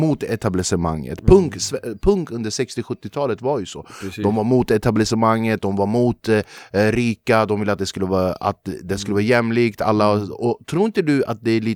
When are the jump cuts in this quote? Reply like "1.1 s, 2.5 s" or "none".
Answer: none